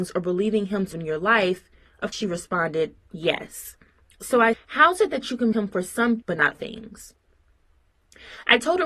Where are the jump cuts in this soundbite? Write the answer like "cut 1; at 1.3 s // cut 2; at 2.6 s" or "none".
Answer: cut 1; at 0.9 s // cut 2; at 2.1 s // cut 3; at 4.5 s // cut 4; at 5.5 s // cut 5; at 6.2 s // cut 6; at 6.5 s